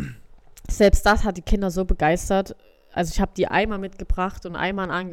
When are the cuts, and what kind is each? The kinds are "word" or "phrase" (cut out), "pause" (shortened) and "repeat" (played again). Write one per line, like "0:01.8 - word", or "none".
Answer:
none